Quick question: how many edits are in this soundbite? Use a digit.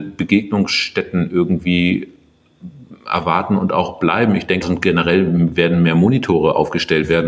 2